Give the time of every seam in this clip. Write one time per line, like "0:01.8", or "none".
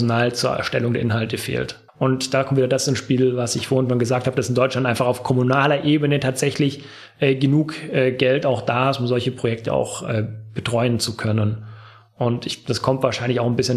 0:01.9